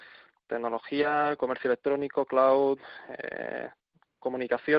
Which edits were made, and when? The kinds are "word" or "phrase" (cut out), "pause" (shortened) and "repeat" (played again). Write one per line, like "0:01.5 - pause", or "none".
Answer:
none